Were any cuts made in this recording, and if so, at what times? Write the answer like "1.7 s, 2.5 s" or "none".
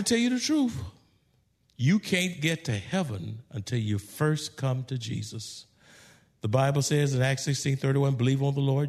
none